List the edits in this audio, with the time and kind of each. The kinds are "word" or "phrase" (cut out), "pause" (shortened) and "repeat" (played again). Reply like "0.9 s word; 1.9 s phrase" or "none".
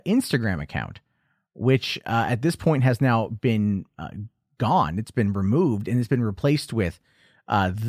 none